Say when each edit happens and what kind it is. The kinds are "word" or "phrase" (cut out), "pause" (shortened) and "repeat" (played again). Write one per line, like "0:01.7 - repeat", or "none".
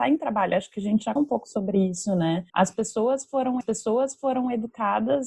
0:01.2 - word
0:02.5 - pause
0:03.6 - repeat